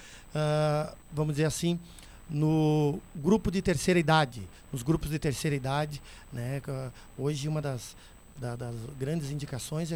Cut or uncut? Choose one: uncut